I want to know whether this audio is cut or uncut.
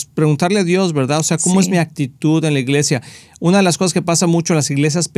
uncut